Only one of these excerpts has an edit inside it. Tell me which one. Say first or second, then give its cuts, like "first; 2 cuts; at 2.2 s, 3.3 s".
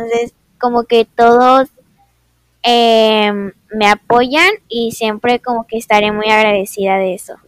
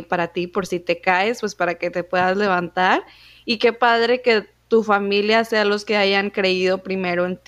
first; 1 cut; at 4.6 s